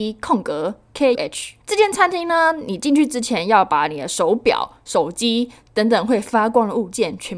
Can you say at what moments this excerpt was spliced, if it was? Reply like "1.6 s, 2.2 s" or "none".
1.1 s, 1.6 s